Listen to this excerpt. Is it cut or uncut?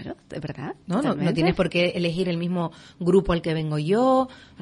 uncut